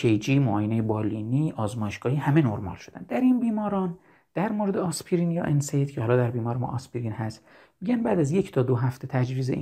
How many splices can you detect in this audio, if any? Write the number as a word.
zero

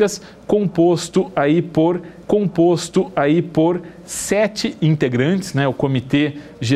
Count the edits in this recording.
one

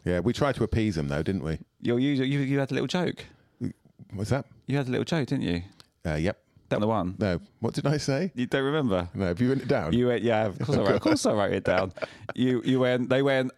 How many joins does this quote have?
one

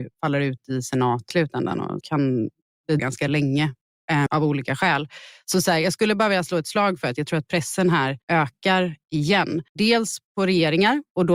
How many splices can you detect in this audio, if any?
six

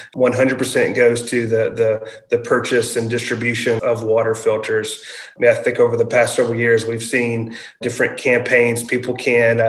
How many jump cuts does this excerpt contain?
one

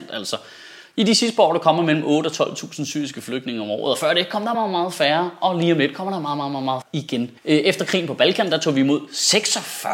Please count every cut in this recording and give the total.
three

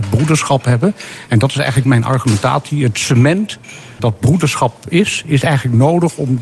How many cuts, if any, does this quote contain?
one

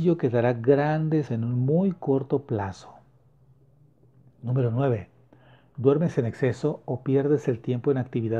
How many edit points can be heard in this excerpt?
one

